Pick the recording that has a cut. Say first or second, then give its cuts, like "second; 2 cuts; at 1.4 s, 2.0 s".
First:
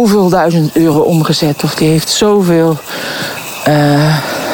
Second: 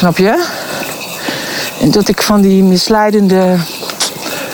second; 1 cut; at 2.0 s